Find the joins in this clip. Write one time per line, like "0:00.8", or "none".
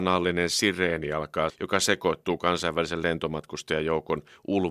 0:01.5

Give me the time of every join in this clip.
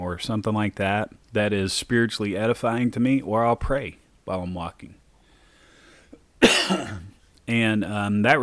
0:01.2

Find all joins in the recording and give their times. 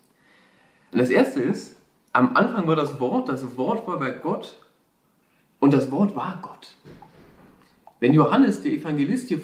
none

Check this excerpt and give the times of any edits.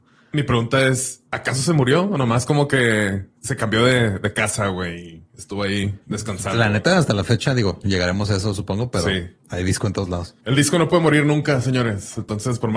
0:01.3
0:03.4
0:06.0
0:09.4
0:10.4

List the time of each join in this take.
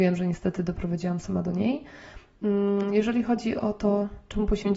none

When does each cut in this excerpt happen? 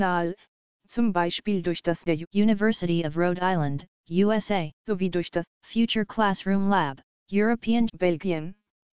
0:02.1
0:07.9

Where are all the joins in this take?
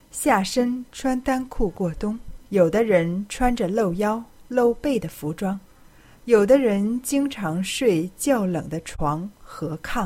0:02.4

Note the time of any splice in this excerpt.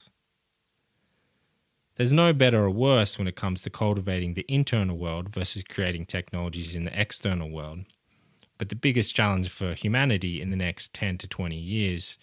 none

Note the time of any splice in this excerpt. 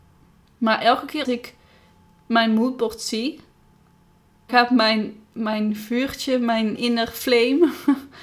0:01.2
0:04.5
0:06.8

